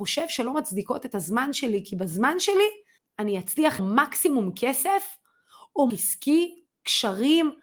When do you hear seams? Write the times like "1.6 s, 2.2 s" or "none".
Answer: 3.8 s, 5.9 s

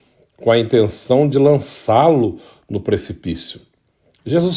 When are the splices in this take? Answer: none

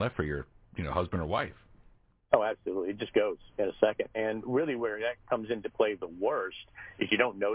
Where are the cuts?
none

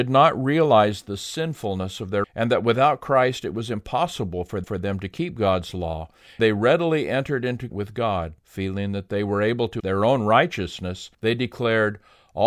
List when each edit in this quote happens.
2.2 s, 4.6 s, 6.4 s, 7.7 s, 8.4 s, 9.8 s, 11.1 s

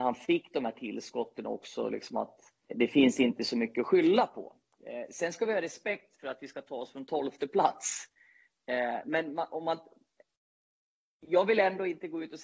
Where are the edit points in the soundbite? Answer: 2.7 s

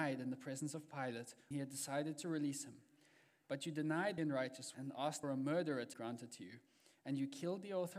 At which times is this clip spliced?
1.5 s, 4.2 s, 4.7 s, 5.2 s, 5.9 s

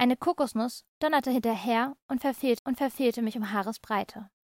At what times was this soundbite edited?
2.6 s

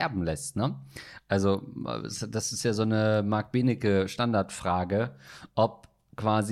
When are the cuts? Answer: none

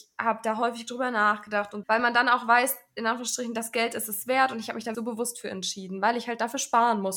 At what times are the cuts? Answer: 1.8 s, 4.9 s

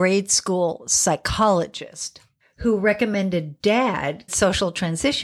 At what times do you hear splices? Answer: 4.3 s

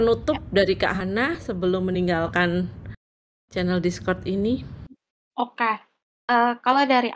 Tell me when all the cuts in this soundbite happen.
none

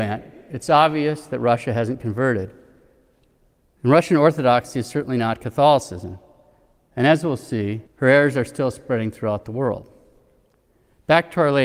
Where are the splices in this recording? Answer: 7.9 s

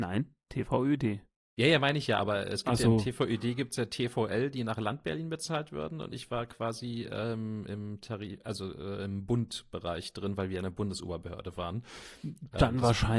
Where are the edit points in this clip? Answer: none

